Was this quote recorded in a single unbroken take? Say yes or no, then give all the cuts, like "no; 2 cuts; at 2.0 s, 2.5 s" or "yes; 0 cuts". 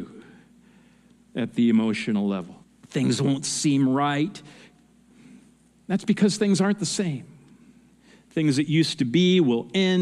no; 1 cut; at 2.6 s